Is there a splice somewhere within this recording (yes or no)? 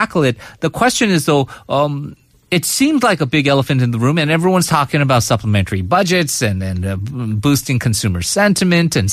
no